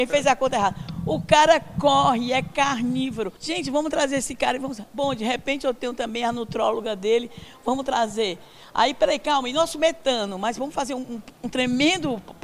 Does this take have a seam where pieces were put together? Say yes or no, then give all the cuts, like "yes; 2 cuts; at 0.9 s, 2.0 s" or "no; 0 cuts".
yes; 1 cut; at 3.4 s